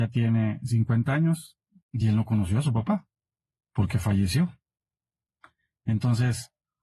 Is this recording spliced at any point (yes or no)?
no